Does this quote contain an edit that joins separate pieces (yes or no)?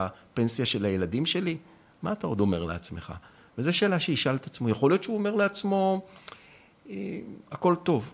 no